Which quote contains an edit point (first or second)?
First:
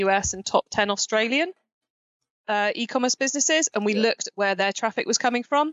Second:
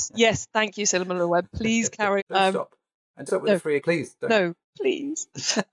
second